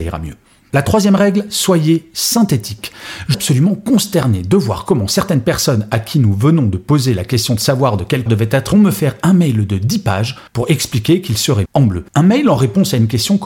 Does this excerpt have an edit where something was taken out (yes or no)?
yes